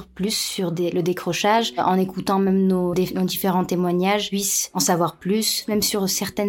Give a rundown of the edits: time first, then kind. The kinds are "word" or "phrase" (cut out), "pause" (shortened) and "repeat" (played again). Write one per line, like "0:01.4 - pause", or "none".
0:02.9 - word